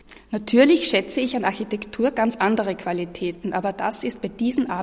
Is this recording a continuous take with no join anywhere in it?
yes; 0 cuts

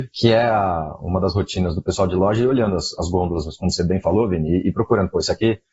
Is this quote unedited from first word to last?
yes; 0 cuts

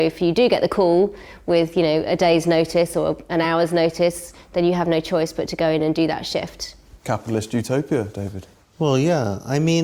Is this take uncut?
yes; 0 cuts

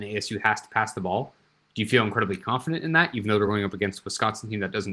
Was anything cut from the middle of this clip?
no; 0 cuts

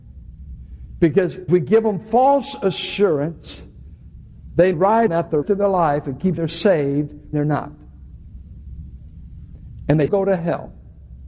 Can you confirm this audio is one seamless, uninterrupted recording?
no; 7 cuts; at 1.5 s, 4.7 s, 5.1 s, 5.4 s, 6.4 s, 7.3 s, 10.1 s

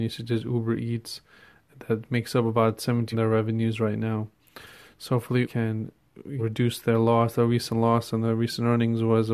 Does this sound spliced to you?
yes; 3 cuts; at 3.1 s, 5.4 s, 6.4 s

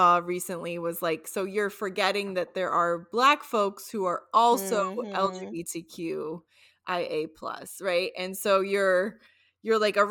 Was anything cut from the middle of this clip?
no; 0 cuts

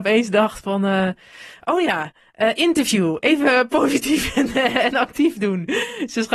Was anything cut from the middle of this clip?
no; 0 cuts

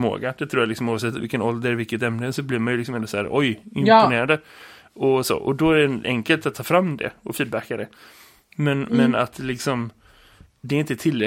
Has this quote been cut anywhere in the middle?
no; 0 cuts

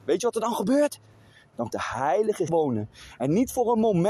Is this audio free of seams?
no; 2 cuts; at 1.7 s, 2.5 s

